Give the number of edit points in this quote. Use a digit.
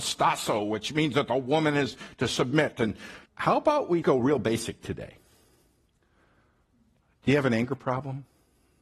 2